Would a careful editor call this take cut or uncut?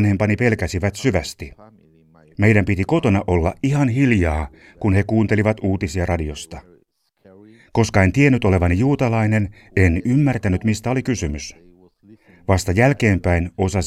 uncut